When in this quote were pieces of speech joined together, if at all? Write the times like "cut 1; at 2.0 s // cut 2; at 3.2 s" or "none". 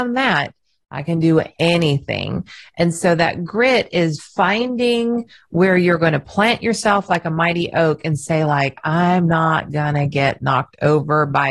cut 1; at 4.2 s